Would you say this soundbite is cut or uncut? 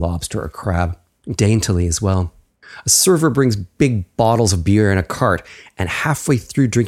cut